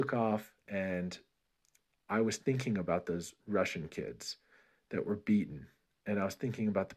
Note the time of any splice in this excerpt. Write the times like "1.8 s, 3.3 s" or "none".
none